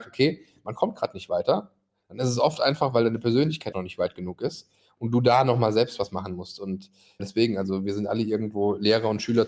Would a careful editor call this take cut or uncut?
cut